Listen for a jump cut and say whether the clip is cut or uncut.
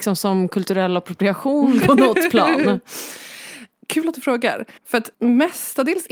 cut